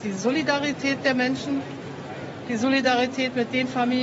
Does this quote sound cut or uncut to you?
uncut